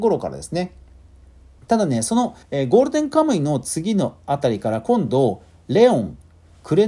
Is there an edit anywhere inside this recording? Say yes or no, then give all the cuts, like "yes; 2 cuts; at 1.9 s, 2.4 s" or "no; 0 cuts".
yes; 1 cut; at 2.4 s